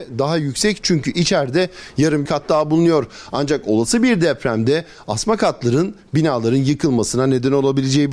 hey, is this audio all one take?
no; 1 cut; at 2.3 s

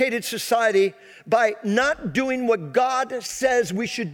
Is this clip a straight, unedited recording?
yes; 0 cuts

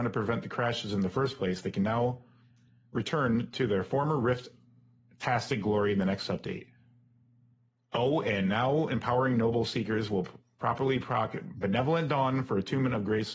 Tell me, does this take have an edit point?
no; 0 cuts

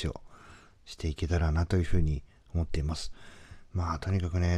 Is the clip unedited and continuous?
yes; 0 cuts

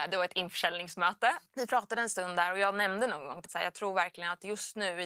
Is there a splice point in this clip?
yes; 1 cut; at 3.4 s

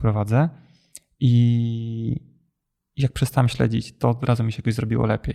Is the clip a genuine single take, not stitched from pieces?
yes; 0 cuts

